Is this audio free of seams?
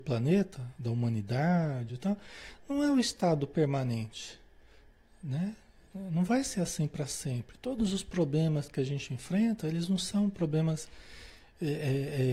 yes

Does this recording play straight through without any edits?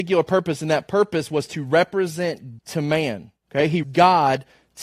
no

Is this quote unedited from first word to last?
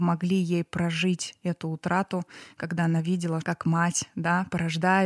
no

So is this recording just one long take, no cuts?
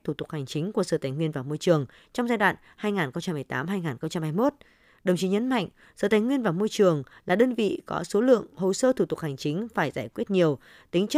yes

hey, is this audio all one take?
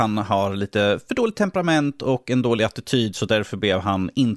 yes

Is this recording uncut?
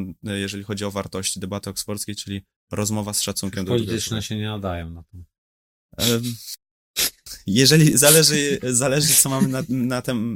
yes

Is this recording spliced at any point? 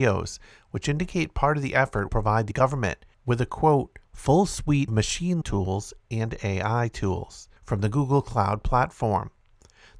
yes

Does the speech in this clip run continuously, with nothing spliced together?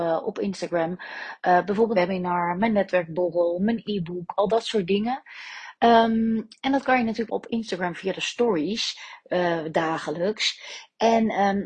no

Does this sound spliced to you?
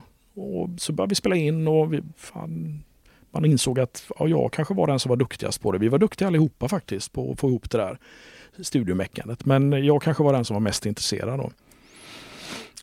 no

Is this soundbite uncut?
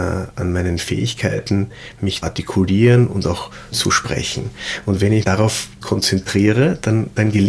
no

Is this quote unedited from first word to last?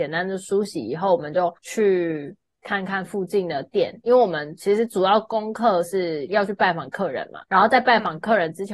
no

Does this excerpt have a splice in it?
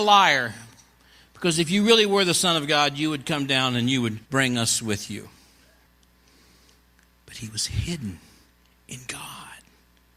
yes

